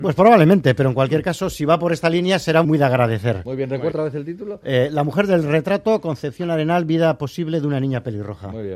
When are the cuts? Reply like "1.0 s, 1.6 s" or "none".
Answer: 2.6 s, 3.9 s